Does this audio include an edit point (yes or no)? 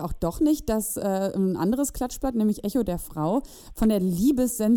no